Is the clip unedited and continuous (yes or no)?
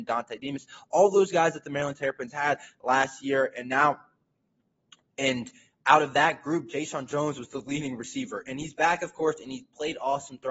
yes